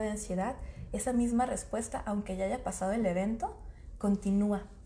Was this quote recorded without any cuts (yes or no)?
yes